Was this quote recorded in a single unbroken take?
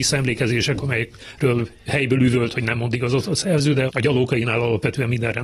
no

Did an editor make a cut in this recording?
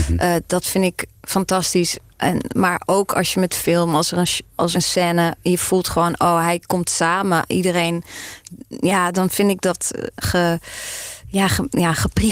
yes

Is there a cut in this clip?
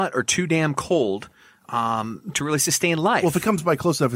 yes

